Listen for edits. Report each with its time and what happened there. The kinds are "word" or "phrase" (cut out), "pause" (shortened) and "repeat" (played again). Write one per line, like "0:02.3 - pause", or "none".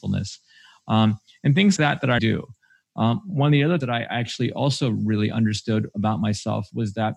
0:01.8 - word
0:02.2 - word
0:03.8 - word

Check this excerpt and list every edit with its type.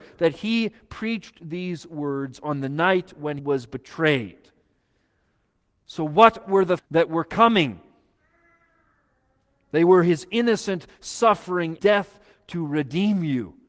0:03.4 - word
0:06.8 - word
0:11.8 - word

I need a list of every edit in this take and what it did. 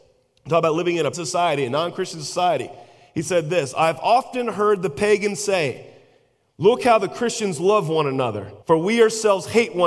0:01.1 - word
0:08.6 - pause

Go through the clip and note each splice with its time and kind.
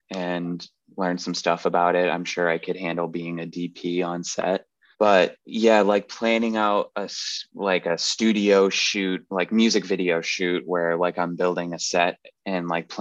0:05.4 - pause

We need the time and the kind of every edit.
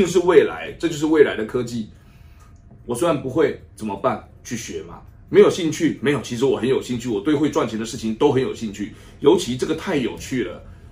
none

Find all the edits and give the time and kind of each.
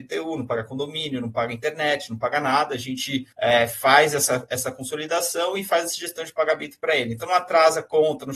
0:03.3 - pause

